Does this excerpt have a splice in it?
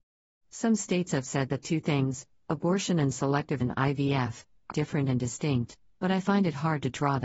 yes; 3 cuts; at 1.6 s, 3.6 s, 4.7 s

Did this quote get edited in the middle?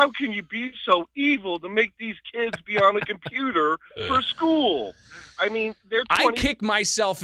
no; 0 cuts

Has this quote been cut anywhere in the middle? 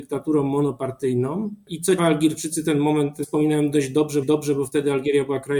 yes; 3 cuts; at 2.0 s, 3.2 s, 4.2 s

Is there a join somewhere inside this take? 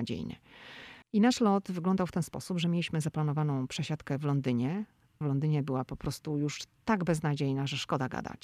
yes; 2 cuts; at 1.0 s, 5.2 s

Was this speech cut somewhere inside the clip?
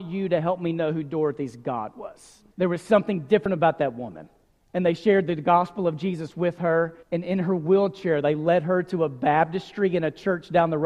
yes; 3 cuts; at 2.5 s, 4.4 s, 7.0 s

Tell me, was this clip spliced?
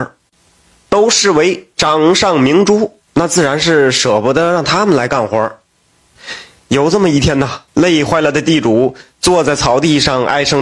yes; 3 cuts; at 3.1 s, 6.6 s, 7.7 s

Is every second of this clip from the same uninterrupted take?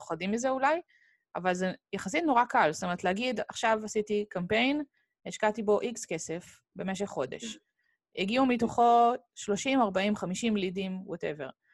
yes; 0 cuts

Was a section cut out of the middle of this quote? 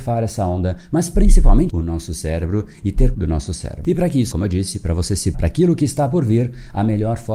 yes; 4 cuts; at 1.7 s, 3.1 s, 4.3 s, 5.3 s

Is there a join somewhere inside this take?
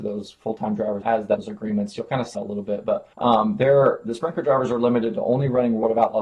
yes; 4 cuts; at 1.0 s, 1.4 s, 2.3 s, 3.1 s

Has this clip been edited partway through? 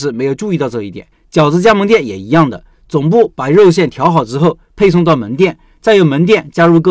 yes; 1 cut; at 1.1 s

